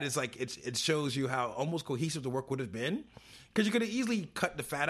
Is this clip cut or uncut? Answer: uncut